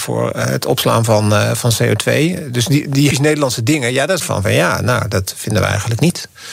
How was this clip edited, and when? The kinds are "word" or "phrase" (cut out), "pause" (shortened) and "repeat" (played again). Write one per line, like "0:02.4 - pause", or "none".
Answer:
0:03.1 - phrase
0:04.2 - phrase